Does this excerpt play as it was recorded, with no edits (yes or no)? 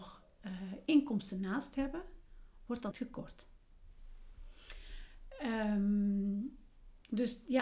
no